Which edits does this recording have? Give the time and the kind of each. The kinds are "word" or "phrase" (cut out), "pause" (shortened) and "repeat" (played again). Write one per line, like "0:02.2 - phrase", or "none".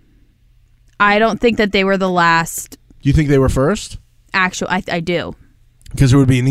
none